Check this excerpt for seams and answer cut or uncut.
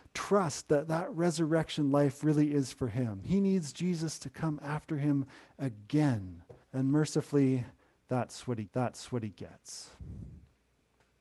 cut